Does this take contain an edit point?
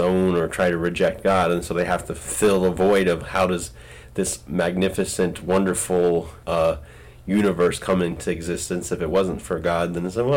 yes; 2 cuts; at 3.2 s, 6.4 s

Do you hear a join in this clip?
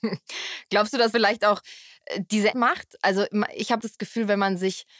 yes; 3 cuts; at 1.1 s, 2.5 s, 3.8 s

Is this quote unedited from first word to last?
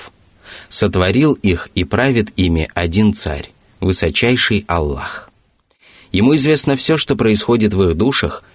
yes; 0 cuts

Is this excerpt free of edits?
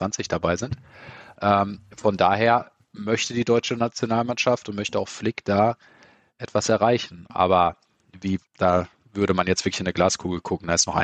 no; 1 cut; at 8.5 s

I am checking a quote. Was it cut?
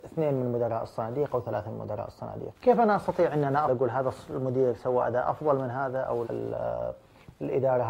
yes; 3 cuts; at 2.5 s, 3.7 s, 6.2 s

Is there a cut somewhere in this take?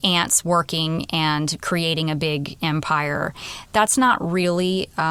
no; 0 cuts

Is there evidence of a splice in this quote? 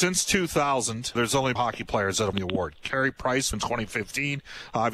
yes; 4 cuts; at 1.2 s, 1.6 s, 2.3 s, 3.5 s

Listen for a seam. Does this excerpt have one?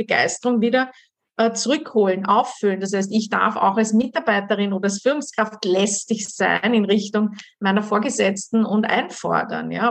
no; 0 cuts

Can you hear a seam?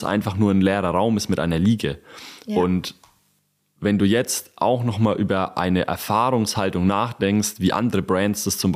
no; 0 cuts

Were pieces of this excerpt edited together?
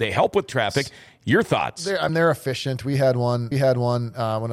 yes; 2 cuts; at 2.1 s, 3.5 s

